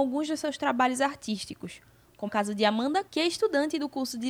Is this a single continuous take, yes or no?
no